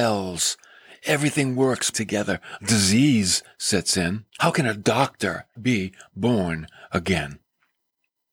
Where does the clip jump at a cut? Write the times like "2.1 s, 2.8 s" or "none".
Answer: 1.9 s, 2.6 s, 4.3 s, 5.5 s